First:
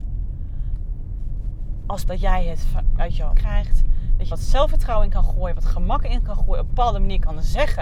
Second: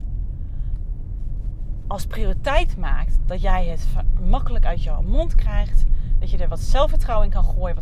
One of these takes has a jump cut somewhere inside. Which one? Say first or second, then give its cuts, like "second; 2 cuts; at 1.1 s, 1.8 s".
first; 4 cuts; at 2.0 s, 3.0 s, 3.3 s, 4.3 s